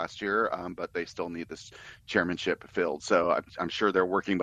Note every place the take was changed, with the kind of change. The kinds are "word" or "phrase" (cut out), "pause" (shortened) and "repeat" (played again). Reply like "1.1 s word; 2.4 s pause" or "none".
none